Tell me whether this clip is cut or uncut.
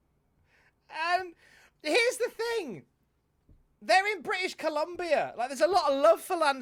uncut